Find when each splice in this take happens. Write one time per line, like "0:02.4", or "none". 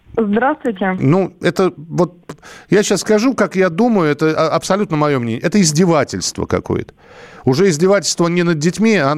none